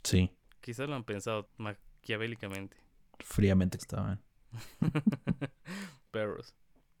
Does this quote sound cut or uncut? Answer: cut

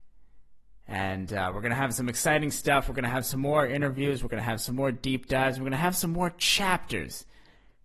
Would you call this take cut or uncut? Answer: uncut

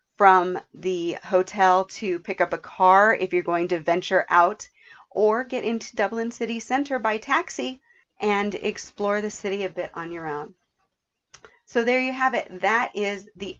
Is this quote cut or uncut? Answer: cut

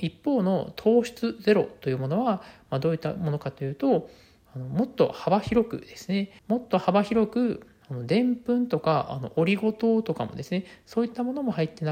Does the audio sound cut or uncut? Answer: cut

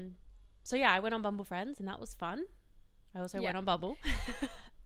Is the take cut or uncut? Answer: uncut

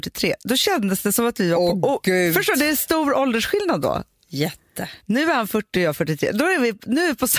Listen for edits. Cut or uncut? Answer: uncut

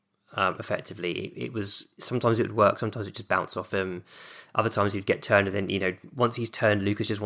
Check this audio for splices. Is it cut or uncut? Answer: uncut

